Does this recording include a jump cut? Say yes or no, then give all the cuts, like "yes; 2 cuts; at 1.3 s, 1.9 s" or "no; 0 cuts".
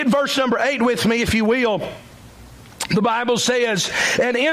no; 0 cuts